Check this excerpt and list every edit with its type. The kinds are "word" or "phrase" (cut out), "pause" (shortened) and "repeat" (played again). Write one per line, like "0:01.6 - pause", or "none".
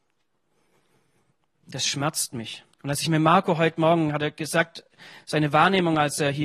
0:02.7 - pause